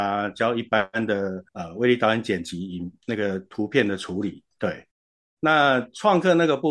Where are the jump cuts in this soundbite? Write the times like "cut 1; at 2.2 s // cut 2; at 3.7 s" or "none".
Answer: cut 1; at 1.5 s